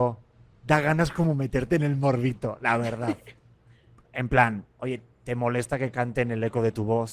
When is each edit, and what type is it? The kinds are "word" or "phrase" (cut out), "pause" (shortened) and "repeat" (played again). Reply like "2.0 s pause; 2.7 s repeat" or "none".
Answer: 3.4 s pause